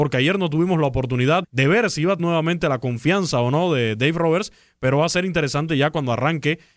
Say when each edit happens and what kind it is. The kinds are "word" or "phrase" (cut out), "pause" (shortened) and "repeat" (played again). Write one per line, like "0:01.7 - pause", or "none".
0:01.4 - word
0:02.2 - word